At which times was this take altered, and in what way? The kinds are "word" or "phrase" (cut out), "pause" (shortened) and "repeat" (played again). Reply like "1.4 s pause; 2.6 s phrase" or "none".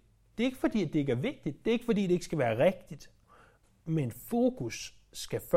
none

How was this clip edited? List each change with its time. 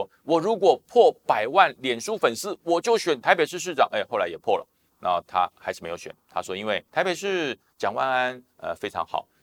4.9 s word; 6.9 s pause

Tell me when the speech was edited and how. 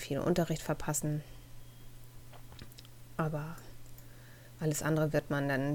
4.6 s word

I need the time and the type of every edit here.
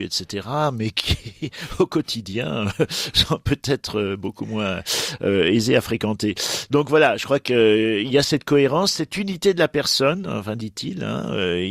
none

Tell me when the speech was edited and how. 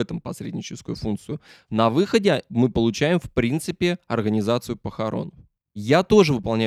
none

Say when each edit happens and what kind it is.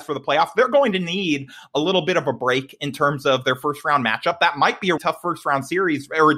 5.0 s word

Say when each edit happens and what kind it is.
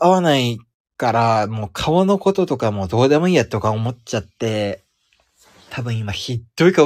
none

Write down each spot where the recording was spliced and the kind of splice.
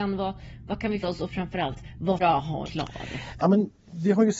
1.0 s word; 2.2 s phrase; 2.6 s phrase; 3.4 s word

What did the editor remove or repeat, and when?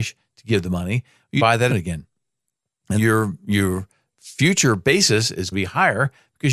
1.4 s word; 1.7 s word; 3.0 s word; 5.5 s word

